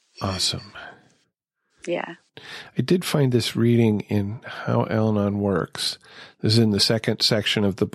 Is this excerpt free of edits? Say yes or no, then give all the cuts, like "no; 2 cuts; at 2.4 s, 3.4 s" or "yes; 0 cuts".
yes; 0 cuts